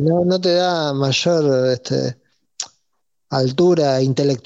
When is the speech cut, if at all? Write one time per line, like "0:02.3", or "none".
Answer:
none